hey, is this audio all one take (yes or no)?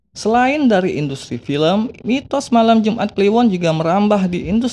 yes